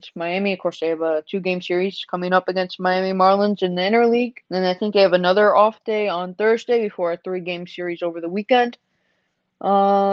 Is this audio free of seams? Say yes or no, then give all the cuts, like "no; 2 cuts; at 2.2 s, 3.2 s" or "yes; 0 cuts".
no; 1 cut; at 4.4 s